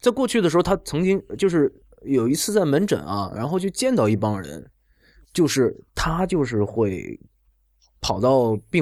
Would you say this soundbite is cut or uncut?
uncut